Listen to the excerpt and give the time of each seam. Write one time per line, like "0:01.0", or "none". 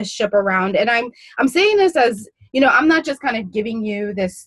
none